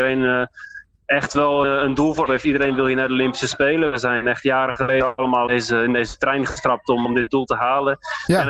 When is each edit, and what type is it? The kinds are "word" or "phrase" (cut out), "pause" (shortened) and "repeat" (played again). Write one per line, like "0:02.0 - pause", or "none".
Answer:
0:01.6 - word
0:02.3 - word
0:05.5 - word
0:07.0 - word